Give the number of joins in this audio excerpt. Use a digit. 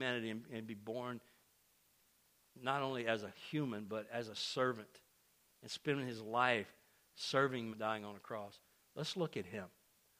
1